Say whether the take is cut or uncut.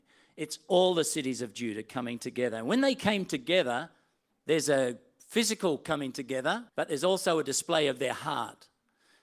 cut